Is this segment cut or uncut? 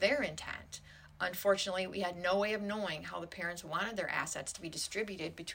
uncut